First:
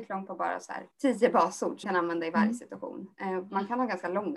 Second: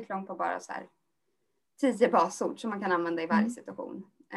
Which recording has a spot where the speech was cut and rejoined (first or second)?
first